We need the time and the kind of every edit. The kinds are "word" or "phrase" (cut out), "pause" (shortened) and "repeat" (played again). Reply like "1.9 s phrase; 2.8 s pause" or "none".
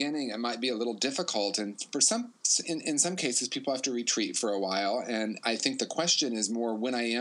none